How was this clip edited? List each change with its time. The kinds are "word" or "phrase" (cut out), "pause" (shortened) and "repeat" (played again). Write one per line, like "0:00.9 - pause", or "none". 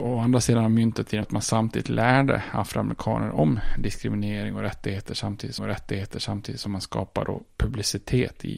0:01.2 - phrase
0:05.6 - repeat